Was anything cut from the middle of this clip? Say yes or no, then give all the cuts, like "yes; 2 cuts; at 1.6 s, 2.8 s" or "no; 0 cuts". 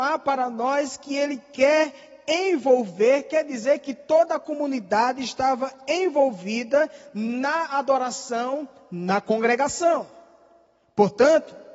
no; 0 cuts